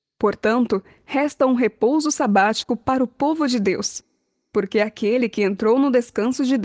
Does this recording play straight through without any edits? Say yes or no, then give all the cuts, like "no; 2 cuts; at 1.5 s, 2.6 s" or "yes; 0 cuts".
yes; 0 cuts